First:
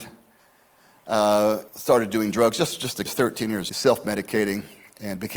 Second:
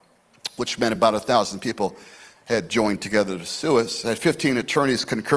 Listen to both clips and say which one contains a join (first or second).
first